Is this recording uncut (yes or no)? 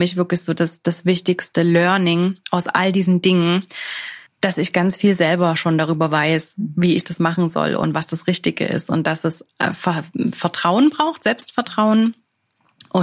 no